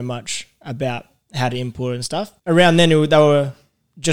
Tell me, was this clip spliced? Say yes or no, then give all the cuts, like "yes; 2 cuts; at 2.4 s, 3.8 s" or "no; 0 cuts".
yes; 1 cut; at 2.4 s